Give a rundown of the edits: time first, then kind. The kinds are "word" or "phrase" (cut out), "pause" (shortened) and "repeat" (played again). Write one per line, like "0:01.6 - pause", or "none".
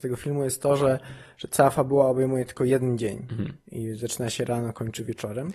none